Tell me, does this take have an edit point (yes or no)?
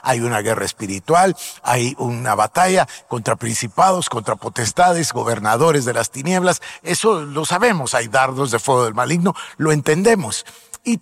no